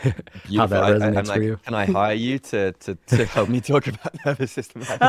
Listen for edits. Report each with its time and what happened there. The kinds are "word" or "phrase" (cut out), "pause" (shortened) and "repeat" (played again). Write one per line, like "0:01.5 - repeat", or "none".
none

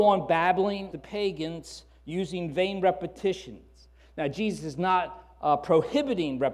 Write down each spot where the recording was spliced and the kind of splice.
0:00.9 - word

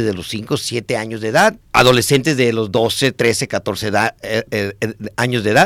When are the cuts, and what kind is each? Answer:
0:01.6 - pause

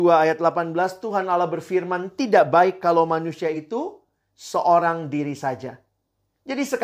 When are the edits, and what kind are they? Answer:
none

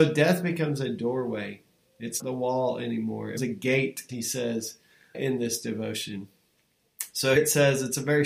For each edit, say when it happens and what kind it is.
0:02.2 - word
0:03.4 - word
0:04.1 - word
0:05.1 - word
0:07.4 - word

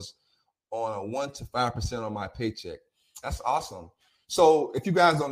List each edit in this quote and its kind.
none

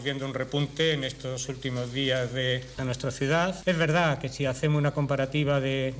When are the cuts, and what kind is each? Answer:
0:02.8 - phrase

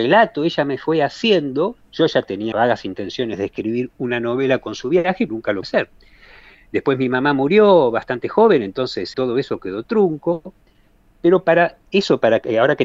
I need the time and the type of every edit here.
0:02.5 - word
0:05.3 - word
0:05.6 - word
0:09.1 - word

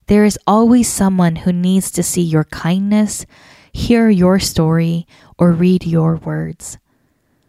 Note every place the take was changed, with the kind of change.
none

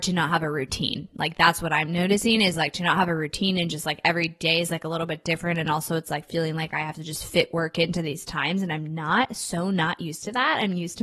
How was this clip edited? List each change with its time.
none

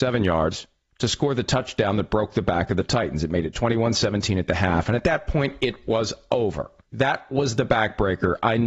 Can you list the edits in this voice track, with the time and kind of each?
0:06.8 - pause

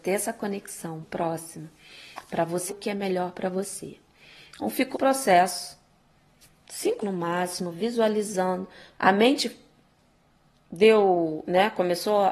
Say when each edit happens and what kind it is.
0:01.0 - word
0:02.7 - word
0:04.9 - word
0:07.0 - word
0:08.9 - word

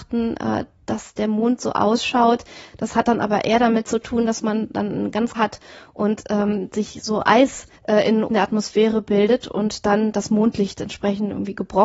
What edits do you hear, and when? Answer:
0:05.3 - phrase
0:07.7 - pause
0:08.3 - phrase

